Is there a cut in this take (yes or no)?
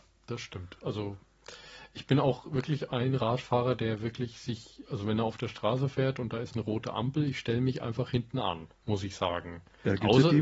yes